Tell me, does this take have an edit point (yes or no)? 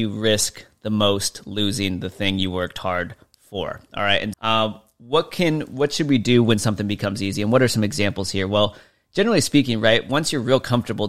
yes